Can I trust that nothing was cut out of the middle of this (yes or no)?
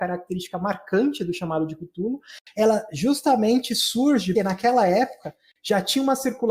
no